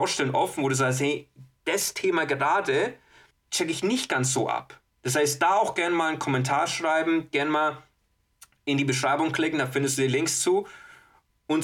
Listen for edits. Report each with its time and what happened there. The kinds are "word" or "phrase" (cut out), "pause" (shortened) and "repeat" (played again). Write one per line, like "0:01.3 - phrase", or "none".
0:03.3 - pause